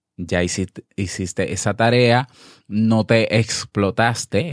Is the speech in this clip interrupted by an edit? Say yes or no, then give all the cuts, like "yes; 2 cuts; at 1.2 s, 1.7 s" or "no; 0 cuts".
no; 0 cuts